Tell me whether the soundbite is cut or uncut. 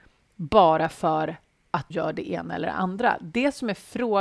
cut